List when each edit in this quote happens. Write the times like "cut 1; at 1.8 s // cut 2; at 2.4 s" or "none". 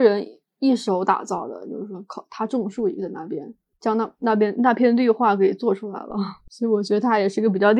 none